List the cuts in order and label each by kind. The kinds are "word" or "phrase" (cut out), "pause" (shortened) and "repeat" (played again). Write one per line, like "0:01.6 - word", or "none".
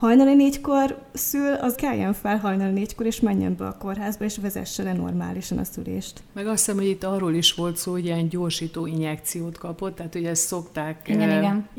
0:01.7 - phrase